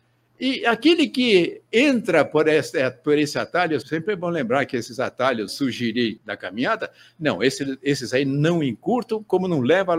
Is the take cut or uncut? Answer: cut